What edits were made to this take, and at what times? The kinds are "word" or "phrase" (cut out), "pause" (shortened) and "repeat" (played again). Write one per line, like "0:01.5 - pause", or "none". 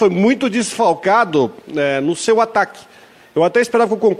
none

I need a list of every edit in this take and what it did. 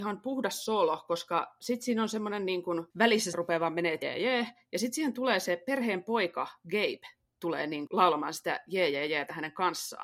0:03.3 - phrase
0:04.0 - word
0:07.9 - word

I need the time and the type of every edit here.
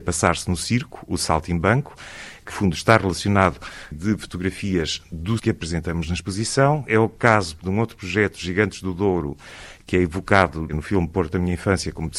0:02.5 - word
0:03.9 - phrase
0:05.4 - word
0:07.6 - word

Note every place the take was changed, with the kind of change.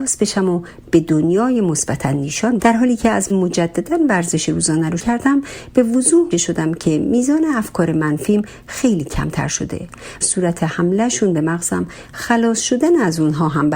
0:02.6 - word
0:03.3 - word
0:05.0 - word
0:06.3 - word
0:10.2 - phrase

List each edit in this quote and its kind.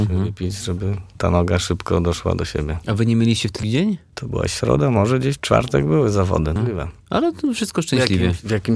0:03.6 - phrase
0:06.6 - word
0:07.0 - pause

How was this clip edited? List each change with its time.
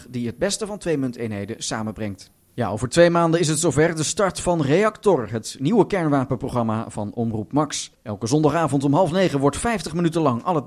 0:07.9 - pause

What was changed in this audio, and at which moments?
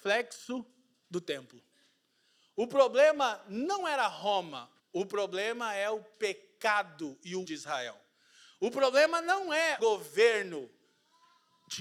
0:04.8 - pause
0:07.4 - word
0:09.8 - word

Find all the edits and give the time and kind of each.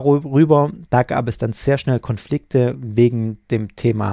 none

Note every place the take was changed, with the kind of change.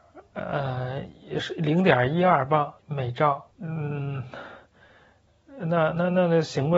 0:02.8 - pause
0:03.5 - pause

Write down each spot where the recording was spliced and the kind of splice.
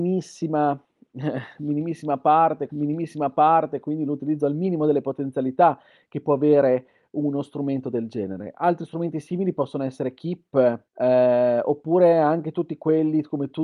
0:02.7 - repeat
0:10.9 - pause

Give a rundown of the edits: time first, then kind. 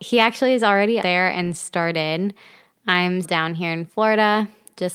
0:01.0 - word
0:03.2 - word

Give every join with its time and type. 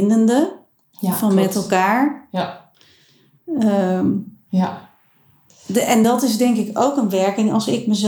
none

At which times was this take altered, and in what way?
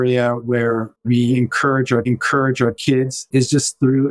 0:01.0 - word
0:02.0 - repeat

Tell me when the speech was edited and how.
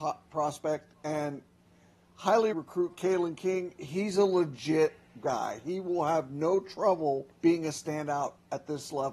0:02.5 - word
0:07.3 - pause

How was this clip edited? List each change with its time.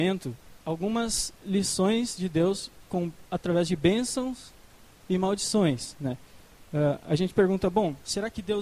none

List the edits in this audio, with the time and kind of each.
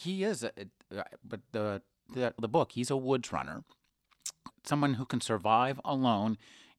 0:02.4 - word
0:04.5 - phrase

